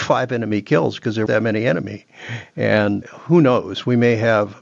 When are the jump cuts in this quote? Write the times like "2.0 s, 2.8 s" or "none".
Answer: 1.3 s, 3.0 s

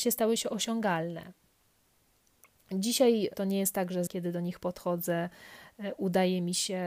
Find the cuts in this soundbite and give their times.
3.3 s, 4.1 s

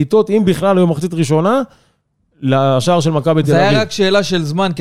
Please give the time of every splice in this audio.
none

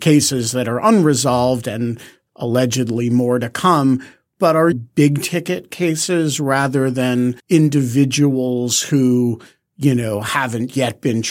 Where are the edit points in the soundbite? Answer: 4.7 s, 7.4 s

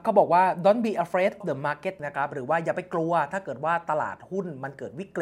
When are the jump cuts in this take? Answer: 1.4 s, 2.0 s

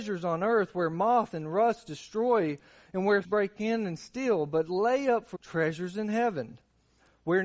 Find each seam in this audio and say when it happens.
3.2 s, 5.3 s

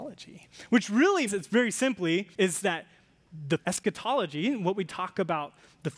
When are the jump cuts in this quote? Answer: 1.3 s, 2.3 s, 3.6 s, 4.9 s

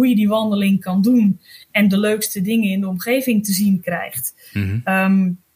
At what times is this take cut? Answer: none

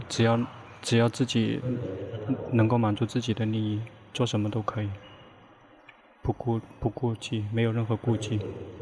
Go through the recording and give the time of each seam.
6.1 s

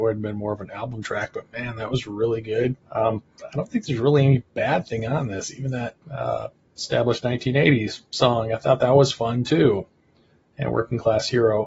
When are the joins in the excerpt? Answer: 2.8 s, 6.0 s

